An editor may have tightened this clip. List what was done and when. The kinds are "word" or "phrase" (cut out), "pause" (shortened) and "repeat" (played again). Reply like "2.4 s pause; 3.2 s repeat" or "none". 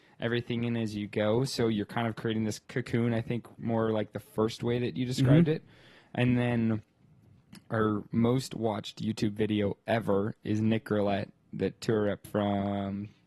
2.6 s pause